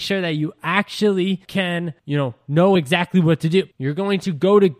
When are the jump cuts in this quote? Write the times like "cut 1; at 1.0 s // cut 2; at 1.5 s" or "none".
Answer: none